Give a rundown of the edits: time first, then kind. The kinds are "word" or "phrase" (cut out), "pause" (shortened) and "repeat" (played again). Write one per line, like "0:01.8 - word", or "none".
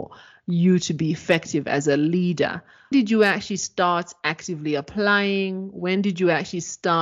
0:02.9 - word